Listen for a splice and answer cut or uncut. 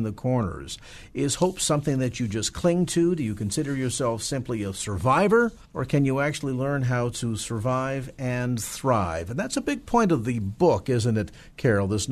cut